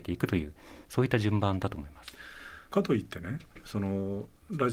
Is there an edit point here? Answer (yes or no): yes